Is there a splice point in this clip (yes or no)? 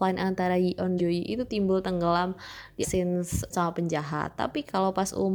yes